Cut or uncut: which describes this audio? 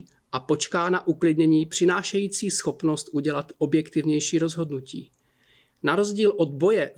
uncut